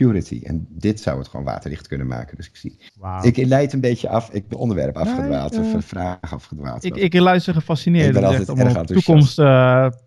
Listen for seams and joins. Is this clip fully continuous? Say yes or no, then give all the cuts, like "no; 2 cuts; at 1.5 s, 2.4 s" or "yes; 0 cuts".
no; 2 cuts; at 2.9 s, 4.5 s